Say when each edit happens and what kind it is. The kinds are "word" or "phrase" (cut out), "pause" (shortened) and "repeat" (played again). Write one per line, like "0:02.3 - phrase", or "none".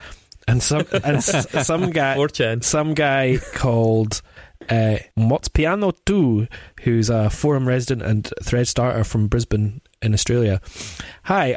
0:05.1 - pause